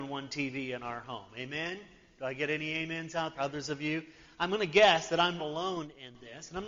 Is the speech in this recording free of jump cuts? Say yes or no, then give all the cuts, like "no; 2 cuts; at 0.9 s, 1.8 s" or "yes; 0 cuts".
no; 2 cuts; at 3.3 s, 5.4 s